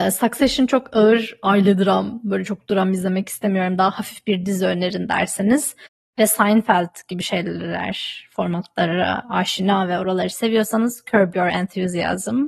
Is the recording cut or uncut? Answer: cut